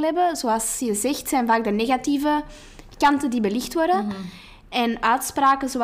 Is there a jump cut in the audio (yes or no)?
no